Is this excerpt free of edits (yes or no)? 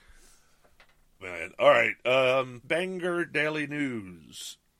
no